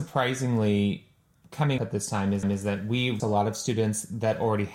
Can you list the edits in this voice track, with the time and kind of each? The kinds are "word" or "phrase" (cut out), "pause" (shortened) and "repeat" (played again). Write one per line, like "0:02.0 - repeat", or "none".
0:01.8 - word
0:02.4 - repeat
0:03.2 - word